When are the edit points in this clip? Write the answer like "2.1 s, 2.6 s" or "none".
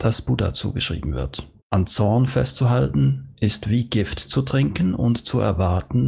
1.6 s